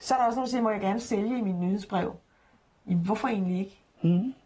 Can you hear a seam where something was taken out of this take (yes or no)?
no